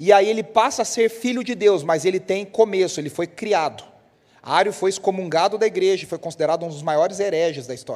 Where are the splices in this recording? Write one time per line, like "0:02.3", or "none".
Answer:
0:04.1